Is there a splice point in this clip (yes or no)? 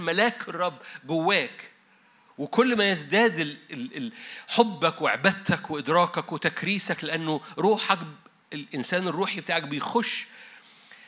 no